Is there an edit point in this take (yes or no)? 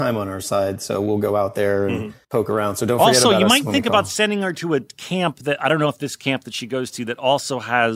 yes